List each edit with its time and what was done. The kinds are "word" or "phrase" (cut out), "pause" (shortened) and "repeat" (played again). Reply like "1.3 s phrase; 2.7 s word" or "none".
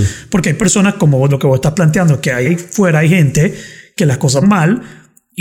1.3 s word; 2.4 s word; 4.4 s word